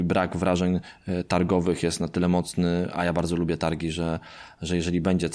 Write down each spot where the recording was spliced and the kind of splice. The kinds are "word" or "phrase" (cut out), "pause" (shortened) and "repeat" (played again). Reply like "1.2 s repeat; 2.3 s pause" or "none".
none